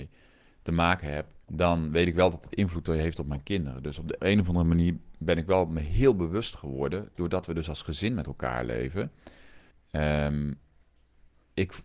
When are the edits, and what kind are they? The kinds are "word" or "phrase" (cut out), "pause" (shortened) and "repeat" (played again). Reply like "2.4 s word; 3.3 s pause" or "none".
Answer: 1.4 s pause; 4.2 s word; 7.1 s word; 9.7 s pause